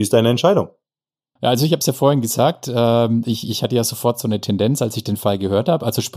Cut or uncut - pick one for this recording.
uncut